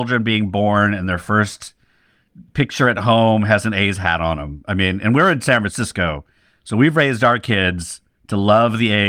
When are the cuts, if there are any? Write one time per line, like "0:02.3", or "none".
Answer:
none